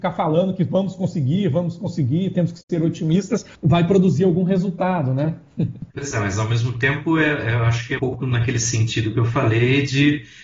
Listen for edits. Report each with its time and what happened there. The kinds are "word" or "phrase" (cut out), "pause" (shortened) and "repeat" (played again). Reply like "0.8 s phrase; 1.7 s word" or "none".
3.5 s pause; 5.9 s pause; 8.0 s word